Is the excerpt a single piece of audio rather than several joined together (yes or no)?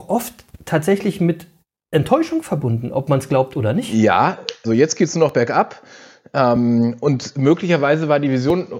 no